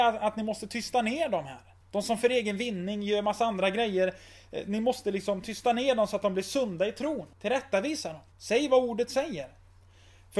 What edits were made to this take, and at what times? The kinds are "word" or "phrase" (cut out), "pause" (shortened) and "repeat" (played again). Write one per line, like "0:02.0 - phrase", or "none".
0:01.8 - pause
0:07.3 - pause
0:08.3 - pause